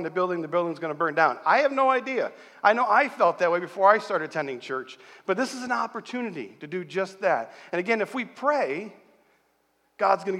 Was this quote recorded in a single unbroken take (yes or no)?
yes